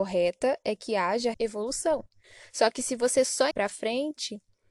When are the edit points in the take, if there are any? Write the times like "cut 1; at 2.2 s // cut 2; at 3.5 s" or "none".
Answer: cut 1; at 1.3 s // cut 2; at 3.5 s